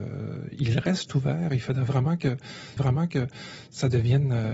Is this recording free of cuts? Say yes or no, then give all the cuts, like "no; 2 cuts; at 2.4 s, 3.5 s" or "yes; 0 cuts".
no; 1 cut; at 2.8 s